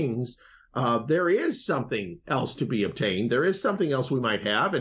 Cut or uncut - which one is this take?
uncut